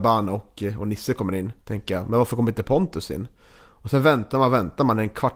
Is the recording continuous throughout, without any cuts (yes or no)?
no